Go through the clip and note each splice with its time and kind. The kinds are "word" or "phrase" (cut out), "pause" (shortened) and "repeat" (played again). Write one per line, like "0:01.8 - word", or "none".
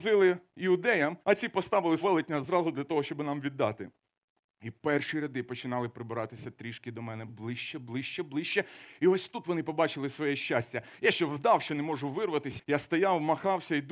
0:01.2 - pause
0:02.0 - word
0:07.3 - word